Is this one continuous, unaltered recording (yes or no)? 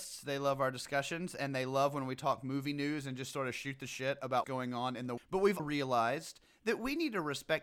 no